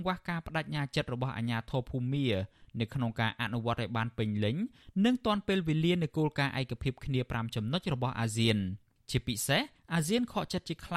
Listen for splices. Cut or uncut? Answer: uncut